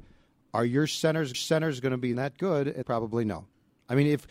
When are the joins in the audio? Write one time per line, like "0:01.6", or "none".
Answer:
0:01.3
0:02.1
0:02.8

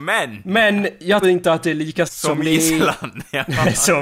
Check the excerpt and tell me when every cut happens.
0:01.2
0:02.1

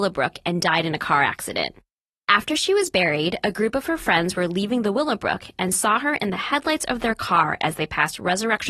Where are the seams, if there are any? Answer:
none

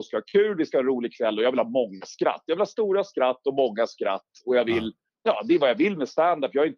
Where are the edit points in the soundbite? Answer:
0:05.1

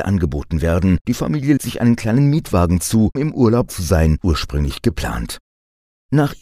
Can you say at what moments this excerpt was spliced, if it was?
0:01.0
0:01.6
0:03.2
0:03.7
0:04.2

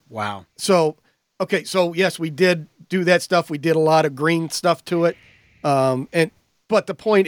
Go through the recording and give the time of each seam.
none

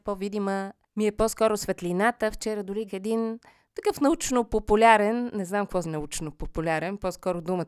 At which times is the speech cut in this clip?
0:02.9
0:05.8

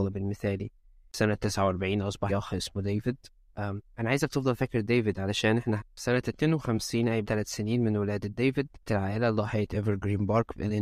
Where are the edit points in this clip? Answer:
0:02.3
0:05.8
0:07.2
0:08.9

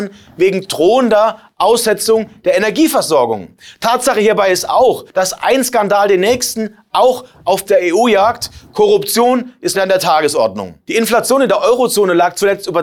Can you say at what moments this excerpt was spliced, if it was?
0:05.1
0:07.7
0:09.7

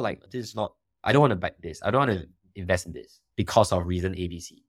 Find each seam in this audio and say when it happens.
none

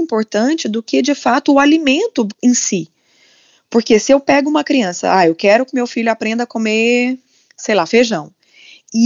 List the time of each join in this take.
none

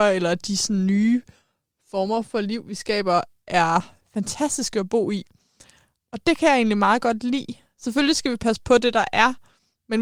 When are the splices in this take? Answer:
none

